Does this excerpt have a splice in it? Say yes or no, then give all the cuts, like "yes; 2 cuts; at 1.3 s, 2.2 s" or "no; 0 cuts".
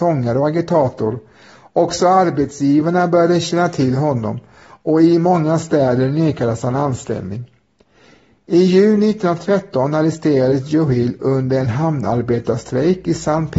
no; 0 cuts